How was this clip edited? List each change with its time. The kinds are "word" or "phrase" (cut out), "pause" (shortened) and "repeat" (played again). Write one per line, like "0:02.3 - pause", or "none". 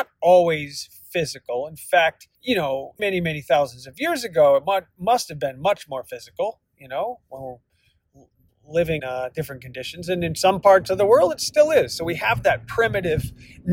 0:02.4 - pause
0:03.0 - word
0:09.0 - word